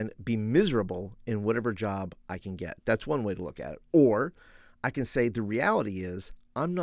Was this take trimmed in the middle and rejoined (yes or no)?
no